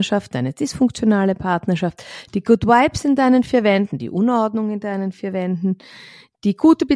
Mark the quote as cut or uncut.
uncut